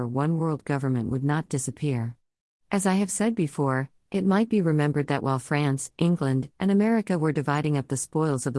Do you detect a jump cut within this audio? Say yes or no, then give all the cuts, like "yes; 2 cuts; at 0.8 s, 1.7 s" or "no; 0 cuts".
no; 0 cuts